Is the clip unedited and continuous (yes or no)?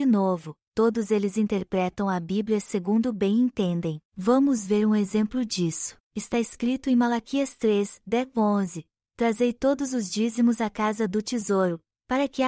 no